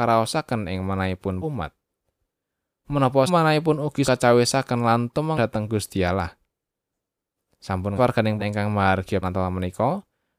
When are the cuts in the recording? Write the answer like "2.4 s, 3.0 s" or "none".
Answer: 1.4 s, 3.3 s, 4.0 s, 5.4 s, 8.0 s, 8.4 s, 9.2 s